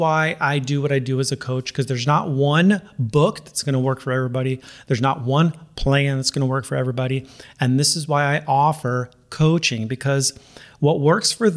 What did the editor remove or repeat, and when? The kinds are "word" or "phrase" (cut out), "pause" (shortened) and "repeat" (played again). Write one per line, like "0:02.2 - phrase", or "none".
none